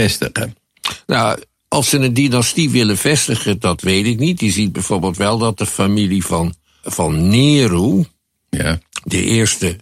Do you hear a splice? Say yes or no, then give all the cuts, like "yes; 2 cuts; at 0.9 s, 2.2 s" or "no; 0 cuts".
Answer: yes; 1 cut; at 6.8 s